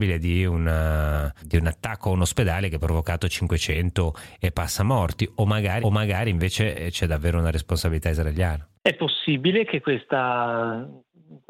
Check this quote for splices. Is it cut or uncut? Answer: cut